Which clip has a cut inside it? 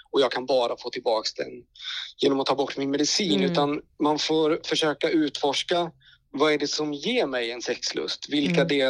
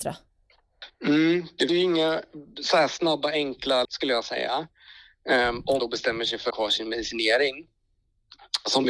second; 4 cuts; at 1.7 s, 3.8 s, 5.8 s, 6.5 s

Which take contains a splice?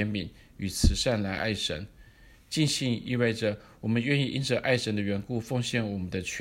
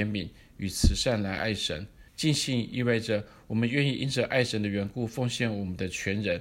second; 1 cut; at 2.1 s

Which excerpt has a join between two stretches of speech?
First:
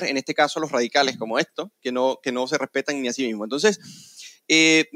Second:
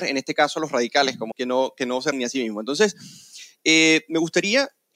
second; 2 cuts; at 1.3 s, 2.1 s

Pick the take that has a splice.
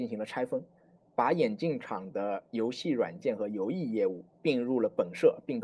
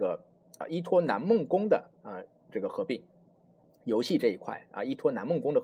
first; 1 cut; at 4.3 s

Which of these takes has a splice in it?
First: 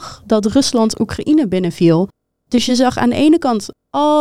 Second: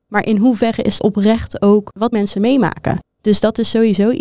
second; 2 cuts; at 1.0 s, 2.1 s

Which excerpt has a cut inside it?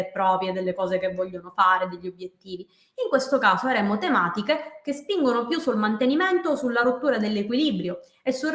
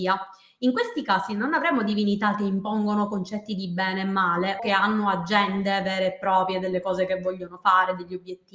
second; 1 cut; at 4.6 s

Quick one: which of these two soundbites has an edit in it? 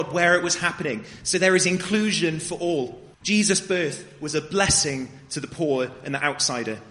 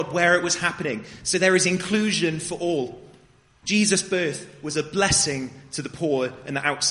first; 1 cut; at 3.1 s

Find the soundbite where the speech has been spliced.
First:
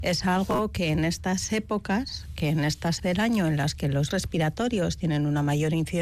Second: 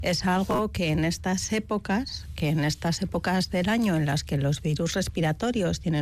first; 2 cuts; at 3.0 s, 4.1 s

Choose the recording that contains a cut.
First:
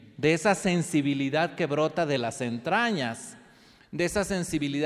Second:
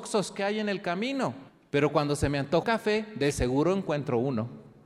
second; 2 cuts; at 1.5 s, 2.6 s

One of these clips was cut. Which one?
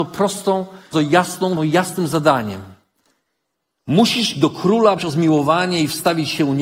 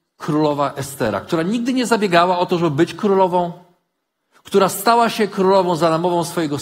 first; 4 cuts; at 0.9 s, 1.6 s, 4.3 s, 5.0 s

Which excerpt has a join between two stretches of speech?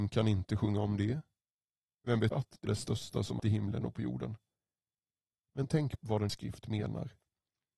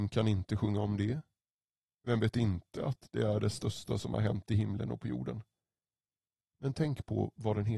first; 5 cuts; at 2.3 s, 2.7 s, 3.4 s, 6.0 s, 6.3 s

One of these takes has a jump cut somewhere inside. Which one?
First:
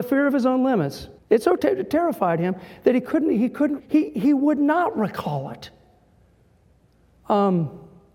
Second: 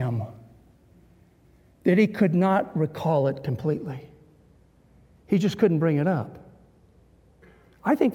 first; 3 cuts; at 1.2 s, 1.6 s, 3.8 s

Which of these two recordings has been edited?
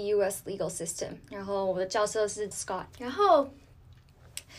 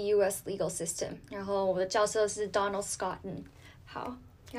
first; 2 cuts; at 2.5 s, 2.9 s

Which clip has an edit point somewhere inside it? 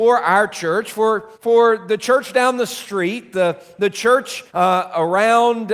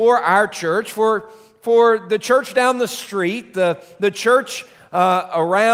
first; 2 cuts; at 1.3 s, 4.5 s

